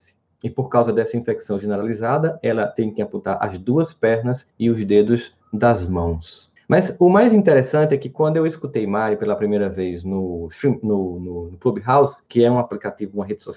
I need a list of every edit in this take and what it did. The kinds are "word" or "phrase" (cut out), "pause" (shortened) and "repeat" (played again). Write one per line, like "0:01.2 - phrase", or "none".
0:04.5 - pause
0:05.4 - pause
0:06.6 - pause
0:12.3 - pause